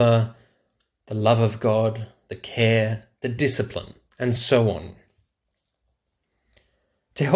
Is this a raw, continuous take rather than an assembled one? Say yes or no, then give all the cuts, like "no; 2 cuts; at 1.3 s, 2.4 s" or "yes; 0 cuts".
yes; 0 cuts